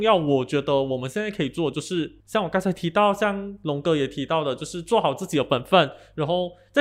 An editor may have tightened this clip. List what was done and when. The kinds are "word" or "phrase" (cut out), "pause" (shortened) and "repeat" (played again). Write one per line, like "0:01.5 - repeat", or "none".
0:02.2 - pause